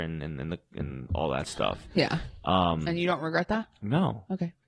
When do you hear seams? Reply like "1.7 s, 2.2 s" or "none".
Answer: none